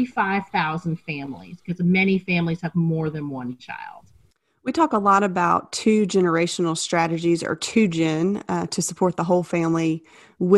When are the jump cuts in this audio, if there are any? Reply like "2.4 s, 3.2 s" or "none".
none